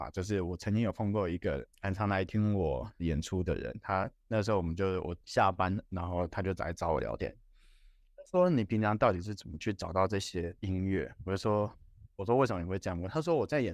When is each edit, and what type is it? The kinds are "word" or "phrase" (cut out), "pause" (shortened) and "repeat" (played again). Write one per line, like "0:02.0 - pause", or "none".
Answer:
0:01.7 - pause
0:05.2 - pause
0:10.6 - pause